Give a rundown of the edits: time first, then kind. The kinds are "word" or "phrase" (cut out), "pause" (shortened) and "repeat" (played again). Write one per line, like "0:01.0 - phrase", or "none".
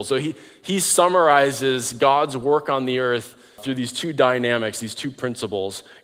0:03.6 - word